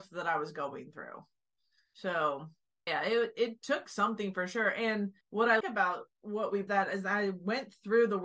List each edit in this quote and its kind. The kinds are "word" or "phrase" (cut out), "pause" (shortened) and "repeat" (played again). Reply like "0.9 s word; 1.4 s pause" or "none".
2.9 s word; 5.2 s pause; 5.6 s word; 6.7 s phrase

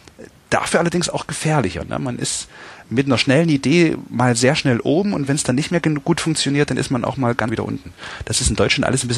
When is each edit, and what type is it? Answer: 2.8 s word; 7.5 s word

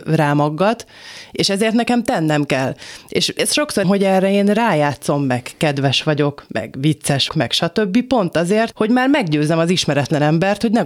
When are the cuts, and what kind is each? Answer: 3.8 s phrase; 7.3 s word; 8.7 s word

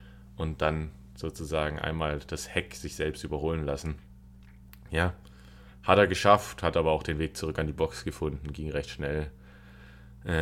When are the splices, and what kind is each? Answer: none

